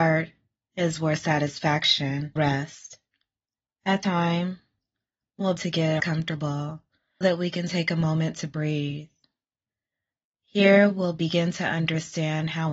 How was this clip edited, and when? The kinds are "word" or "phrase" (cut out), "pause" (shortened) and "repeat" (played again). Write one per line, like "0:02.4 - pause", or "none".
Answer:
0:02.4 - word
0:04.0 - word
0:05.6 - word
0:06.0 - word
0:07.2 - word